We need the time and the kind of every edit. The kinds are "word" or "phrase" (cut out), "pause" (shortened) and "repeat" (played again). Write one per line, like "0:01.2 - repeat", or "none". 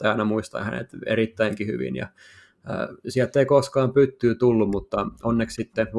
none